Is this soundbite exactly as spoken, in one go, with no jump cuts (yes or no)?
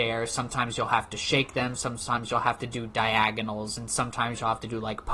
yes